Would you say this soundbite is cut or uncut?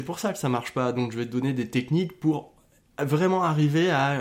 uncut